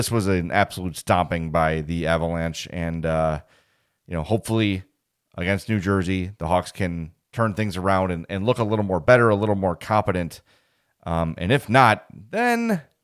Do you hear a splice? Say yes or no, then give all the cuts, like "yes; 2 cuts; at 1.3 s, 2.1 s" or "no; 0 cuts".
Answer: no; 0 cuts